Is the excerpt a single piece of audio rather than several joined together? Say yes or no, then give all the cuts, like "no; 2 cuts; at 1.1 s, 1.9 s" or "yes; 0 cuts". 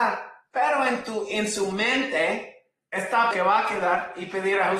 no; 1 cut; at 3.3 s